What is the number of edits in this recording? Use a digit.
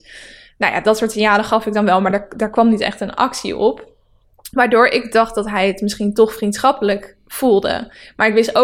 0